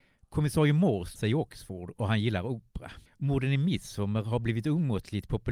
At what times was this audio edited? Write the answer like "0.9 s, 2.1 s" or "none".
1.2 s, 3.1 s